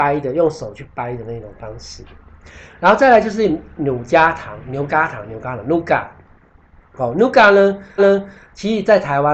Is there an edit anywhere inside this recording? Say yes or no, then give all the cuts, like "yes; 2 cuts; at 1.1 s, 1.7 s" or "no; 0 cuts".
yes; 1 cut; at 8.0 s